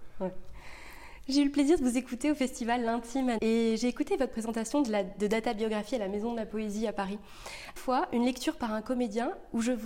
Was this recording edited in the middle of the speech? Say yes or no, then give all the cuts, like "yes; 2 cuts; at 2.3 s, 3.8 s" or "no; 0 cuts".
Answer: yes; 2 cuts; at 3.4 s, 7.8 s